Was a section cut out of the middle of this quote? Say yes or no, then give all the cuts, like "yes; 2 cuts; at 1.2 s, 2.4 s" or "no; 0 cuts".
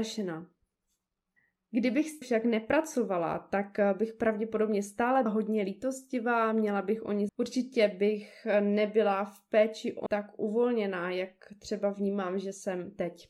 yes; 4 cuts; at 2.2 s, 5.3 s, 7.3 s, 10.1 s